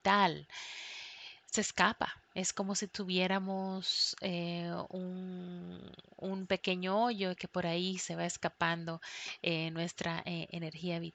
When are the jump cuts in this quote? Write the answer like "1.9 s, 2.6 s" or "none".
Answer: 2.2 s